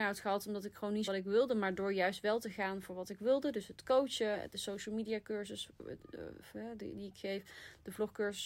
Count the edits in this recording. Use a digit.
1